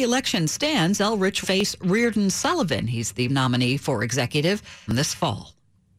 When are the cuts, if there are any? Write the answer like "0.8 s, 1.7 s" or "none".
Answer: 1.4 s, 3.3 s, 4.9 s